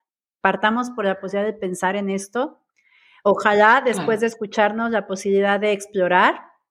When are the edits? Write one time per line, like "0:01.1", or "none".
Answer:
none